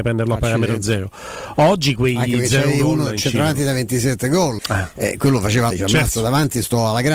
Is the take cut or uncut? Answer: cut